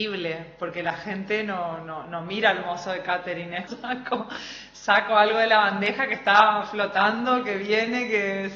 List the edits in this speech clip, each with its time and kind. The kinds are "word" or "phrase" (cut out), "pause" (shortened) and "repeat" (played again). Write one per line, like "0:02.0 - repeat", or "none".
0:03.7 - word